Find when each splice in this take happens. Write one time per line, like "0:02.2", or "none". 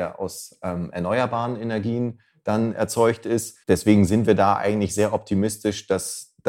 0:03.6

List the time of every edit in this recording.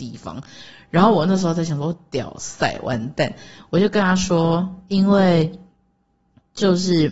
none

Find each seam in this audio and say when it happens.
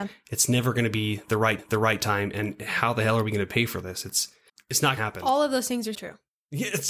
0:01.6
0:04.5
0:05.0
0:05.9

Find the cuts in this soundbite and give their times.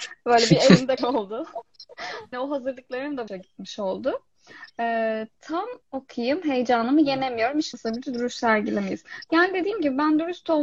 0:01.0
0:02.3
0:03.3
0:05.8
0:07.7

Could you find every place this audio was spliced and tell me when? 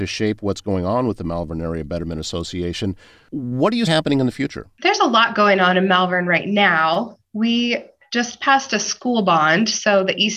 0:03.9

